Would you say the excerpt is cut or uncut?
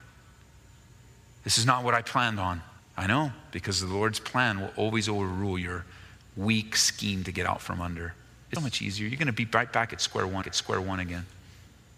cut